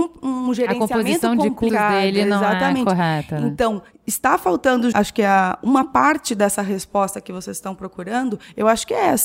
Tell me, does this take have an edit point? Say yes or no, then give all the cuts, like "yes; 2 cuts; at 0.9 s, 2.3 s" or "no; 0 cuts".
yes; 2 cuts; at 1.7 s, 4.9 s